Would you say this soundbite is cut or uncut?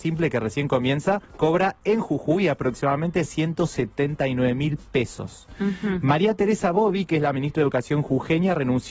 cut